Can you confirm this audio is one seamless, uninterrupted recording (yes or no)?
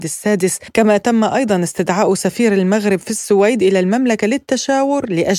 yes